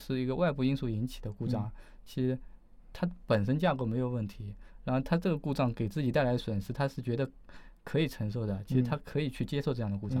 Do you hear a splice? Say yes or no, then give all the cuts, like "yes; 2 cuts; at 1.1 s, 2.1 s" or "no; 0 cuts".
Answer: yes; 1 cut; at 2.8 s